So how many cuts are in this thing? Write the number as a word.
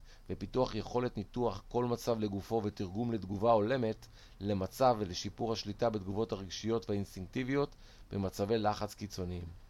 zero